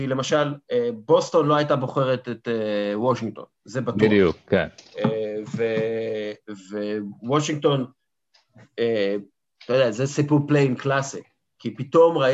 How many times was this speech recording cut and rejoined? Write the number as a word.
zero